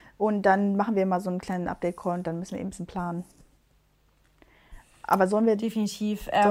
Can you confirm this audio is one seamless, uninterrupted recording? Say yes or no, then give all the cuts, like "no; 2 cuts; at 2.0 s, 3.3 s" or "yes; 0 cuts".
yes; 0 cuts